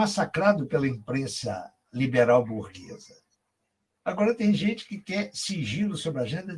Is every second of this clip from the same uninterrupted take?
yes; 0 cuts

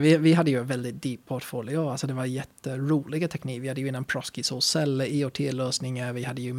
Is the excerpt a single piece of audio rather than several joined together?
no; 1 cut; at 1.2 s

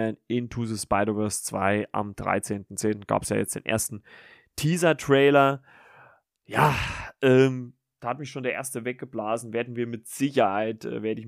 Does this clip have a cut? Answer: no; 0 cuts

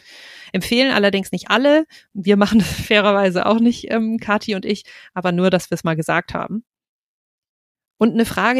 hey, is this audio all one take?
yes; 0 cuts

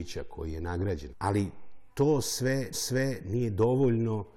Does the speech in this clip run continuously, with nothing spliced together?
no; 2 cuts; at 1.1 s, 2.7 s

